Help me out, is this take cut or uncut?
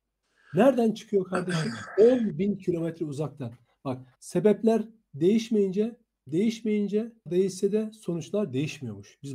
cut